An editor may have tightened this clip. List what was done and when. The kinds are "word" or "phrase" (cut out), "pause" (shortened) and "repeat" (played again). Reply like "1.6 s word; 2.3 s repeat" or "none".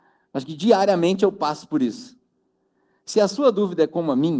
none